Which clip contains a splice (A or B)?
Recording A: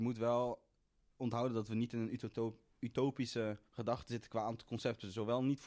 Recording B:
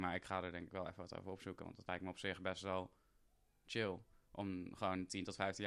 A